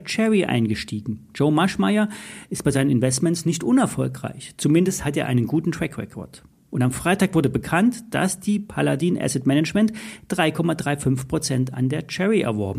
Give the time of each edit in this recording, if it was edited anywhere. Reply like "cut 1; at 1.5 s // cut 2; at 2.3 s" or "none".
none